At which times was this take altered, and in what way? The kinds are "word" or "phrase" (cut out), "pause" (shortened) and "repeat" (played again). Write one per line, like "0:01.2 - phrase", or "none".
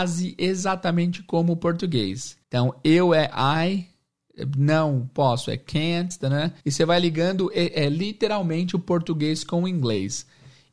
0:02.4 - pause
0:06.6 - pause